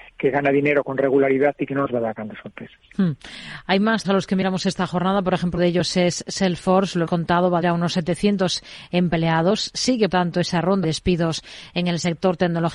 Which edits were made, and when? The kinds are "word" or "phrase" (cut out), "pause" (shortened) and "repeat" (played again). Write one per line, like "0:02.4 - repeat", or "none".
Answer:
0:04.0 - word
0:05.6 - word
0:07.1 - word
0:07.6 - word
0:10.1 - word
0:10.8 - word